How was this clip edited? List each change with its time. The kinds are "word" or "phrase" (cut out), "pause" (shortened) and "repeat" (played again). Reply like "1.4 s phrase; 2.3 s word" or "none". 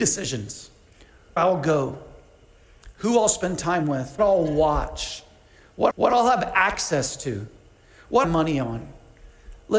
1.4 s word; 4.2 s word; 5.9 s repeat; 8.2 s phrase